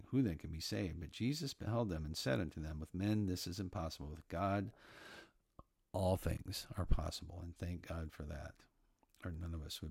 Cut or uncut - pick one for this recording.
uncut